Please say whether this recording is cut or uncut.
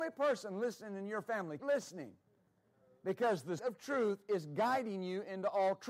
cut